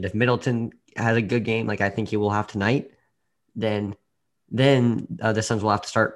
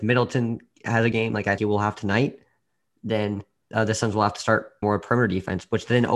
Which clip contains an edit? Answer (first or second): second